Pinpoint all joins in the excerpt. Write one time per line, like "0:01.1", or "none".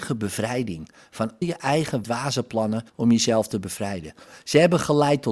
0:01.4
0:02.0
0:02.9

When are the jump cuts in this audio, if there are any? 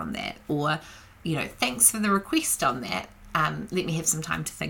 none

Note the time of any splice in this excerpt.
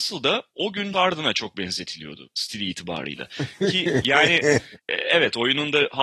0:00.9
0:04.8

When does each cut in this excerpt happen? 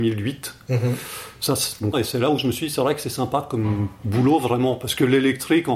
0:01.9

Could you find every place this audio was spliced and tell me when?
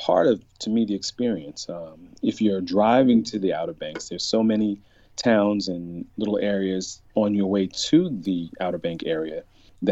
0:07.1

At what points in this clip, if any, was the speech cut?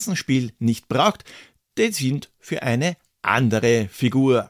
none

